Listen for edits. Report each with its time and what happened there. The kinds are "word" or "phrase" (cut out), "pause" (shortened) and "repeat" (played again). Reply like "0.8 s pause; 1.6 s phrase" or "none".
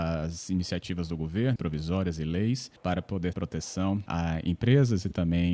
1.6 s phrase; 2.8 s pause; 3.3 s word; 4.1 s word